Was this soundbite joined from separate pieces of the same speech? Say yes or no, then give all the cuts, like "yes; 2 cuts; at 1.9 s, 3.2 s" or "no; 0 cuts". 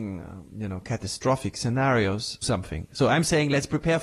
yes; 1 cut; at 2.4 s